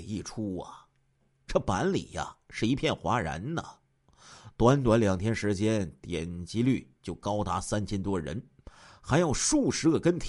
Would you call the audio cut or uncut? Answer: uncut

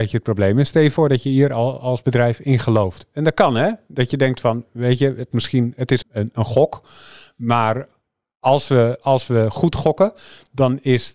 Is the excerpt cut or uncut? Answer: cut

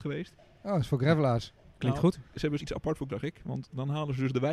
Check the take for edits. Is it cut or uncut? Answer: cut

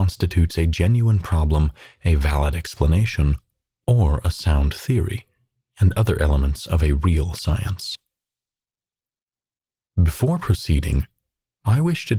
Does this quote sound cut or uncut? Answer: uncut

